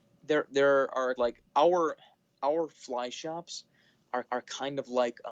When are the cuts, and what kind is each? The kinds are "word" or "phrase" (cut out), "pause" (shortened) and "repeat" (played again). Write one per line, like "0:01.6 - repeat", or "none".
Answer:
0:01.2 - phrase
0:01.5 - pause
0:04.2 - repeat

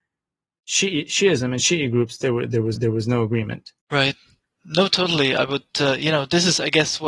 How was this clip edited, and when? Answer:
0:02.8 - repeat
0:03.8 - pause

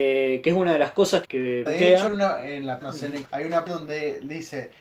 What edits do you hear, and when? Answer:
0:01.2 - word
0:01.7 - word
0:02.1 - word
0:02.8 - word
0:03.2 - word
0:03.7 - word

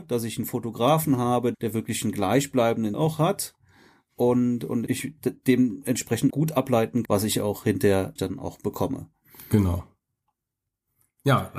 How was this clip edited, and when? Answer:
0:01.5 - word
0:02.9 - word
0:04.9 - word
0:06.3 - word
0:07.0 - word
0:08.2 - word

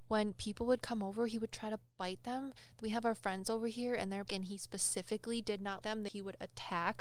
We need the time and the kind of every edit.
0:02.8 - word
0:04.3 - word
0:05.8 - word

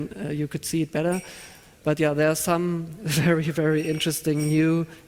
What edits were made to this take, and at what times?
none

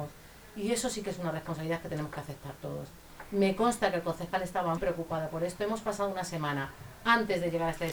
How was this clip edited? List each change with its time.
0:04.8 - word

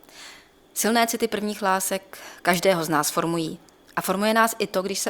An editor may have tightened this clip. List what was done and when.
none

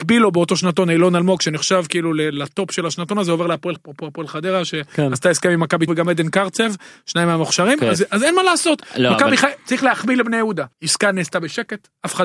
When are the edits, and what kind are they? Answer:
0:03.8 - word
0:05.9 - phrase
0:10.7 - pause

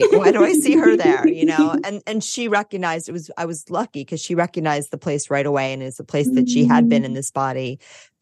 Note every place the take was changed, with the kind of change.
none

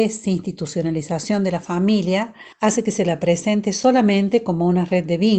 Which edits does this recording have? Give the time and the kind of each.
0:02.5 - pause

